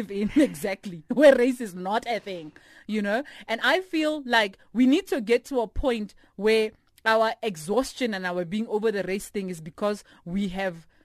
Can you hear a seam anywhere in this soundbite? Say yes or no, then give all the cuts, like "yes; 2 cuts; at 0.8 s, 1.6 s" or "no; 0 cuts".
no; 0 cuts